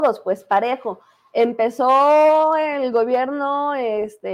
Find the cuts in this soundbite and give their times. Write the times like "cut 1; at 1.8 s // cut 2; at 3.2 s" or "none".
none